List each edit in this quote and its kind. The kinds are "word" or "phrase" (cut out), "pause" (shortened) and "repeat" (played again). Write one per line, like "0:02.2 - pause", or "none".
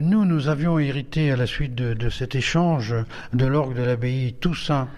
none